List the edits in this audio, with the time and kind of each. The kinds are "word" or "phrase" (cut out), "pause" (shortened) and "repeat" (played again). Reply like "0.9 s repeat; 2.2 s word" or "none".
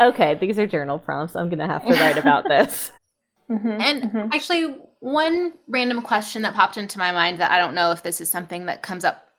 3.0 s pause